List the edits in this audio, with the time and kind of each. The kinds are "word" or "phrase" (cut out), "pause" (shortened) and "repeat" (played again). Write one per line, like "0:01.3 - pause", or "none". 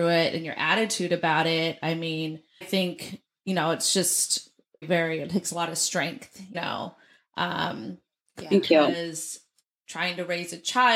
0:02.6 - word
0:04.8 - word
0:06.5 - word